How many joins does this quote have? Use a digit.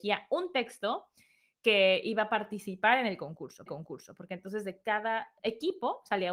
2